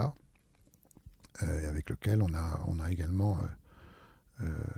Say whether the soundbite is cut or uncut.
uncut